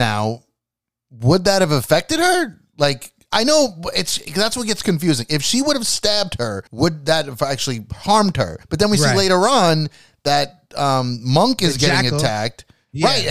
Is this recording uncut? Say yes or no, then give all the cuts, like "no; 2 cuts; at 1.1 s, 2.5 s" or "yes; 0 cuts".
no; 2 cuts; at 6.7 s, 8.6 s